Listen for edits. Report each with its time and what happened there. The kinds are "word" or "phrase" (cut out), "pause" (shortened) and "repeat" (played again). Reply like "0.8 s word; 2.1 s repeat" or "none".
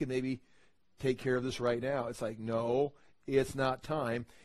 none